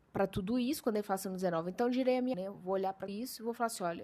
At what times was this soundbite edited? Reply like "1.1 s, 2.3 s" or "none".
2.3 s, 3.1 s